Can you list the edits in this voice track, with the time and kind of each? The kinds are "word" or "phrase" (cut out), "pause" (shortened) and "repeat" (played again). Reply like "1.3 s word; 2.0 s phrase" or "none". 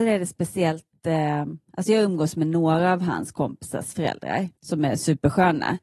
4.6 s pause